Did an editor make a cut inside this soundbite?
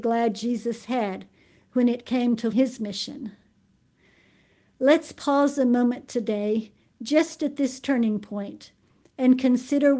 yes; 1 cut; at 2.5 s

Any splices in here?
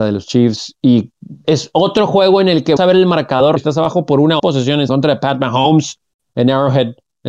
yes; 5 cuts; at 1.4 s, 2.8 s, 3.6 s, 4.4 s, 4.9 s

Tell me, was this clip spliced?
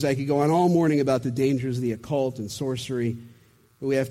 no; 0 cuts

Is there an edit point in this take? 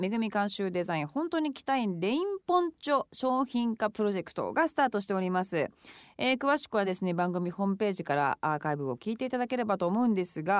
no; 0 cuts

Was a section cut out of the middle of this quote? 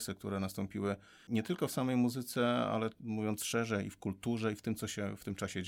no; 0 cuts

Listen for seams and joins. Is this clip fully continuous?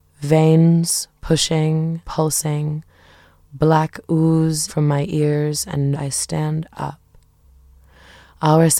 no; 3 cuts; at 2.0 s, 4.7 s, 5.9 s

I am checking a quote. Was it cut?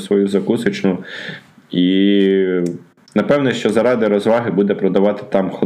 no; 0 cuts

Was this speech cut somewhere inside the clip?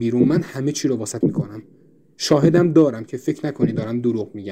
yes; 1 cut; at 1.2 s

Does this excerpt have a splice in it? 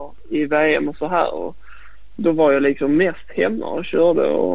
no; 0 cuts

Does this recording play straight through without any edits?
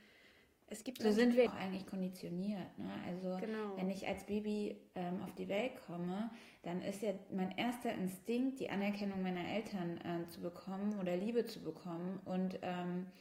no; 1 cut; at 1.5 s

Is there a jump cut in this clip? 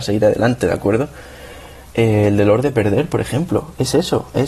no; 0 cuts

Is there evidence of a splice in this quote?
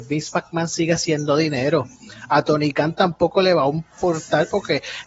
no; 0 cuts

